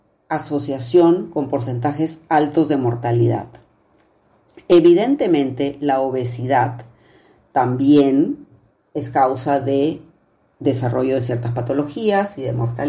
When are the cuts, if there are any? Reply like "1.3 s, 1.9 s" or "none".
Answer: none